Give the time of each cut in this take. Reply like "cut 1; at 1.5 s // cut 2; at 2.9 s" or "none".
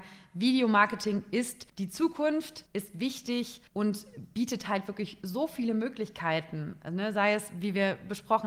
cut 1; at 1.7 s // cut 2; at 2.7 s // cut 3; at 3.7 s